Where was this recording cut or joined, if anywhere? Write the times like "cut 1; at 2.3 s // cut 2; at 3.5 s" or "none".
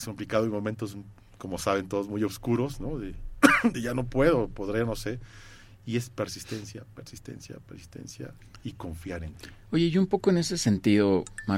none

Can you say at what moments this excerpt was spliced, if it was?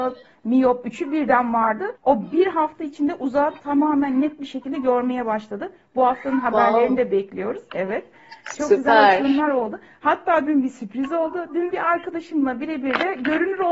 cut 1; at 1.9 s

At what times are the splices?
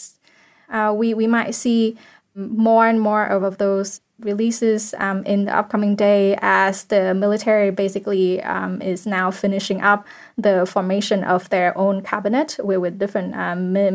none

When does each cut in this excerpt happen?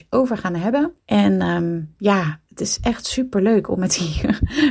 cut 1; at 1.0 s

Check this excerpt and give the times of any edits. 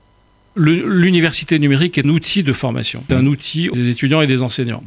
cut 1; at 2.0 s // cut 2; at 3.1 s // cut 3; at 3.7 s

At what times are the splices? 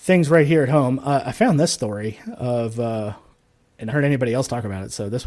cut 1; at 3.9 s

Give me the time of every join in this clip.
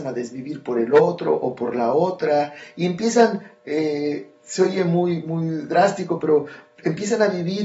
none

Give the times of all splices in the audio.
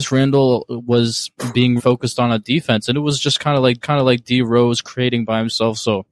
cut 1; at 1.8 s // cut 2; at 3.8 s

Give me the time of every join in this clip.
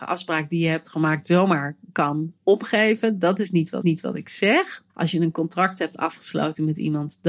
cut 1; at 3.8 s // cut 2; at 4.9 s

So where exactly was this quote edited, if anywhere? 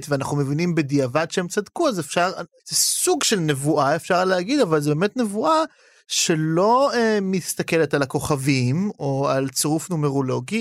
none

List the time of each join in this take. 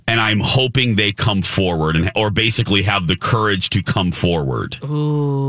none

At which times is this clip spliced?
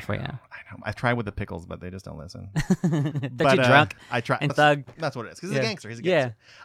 cut 1; at 4.5 s

